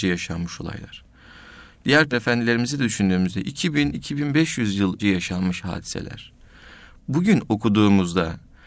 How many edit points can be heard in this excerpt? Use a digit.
2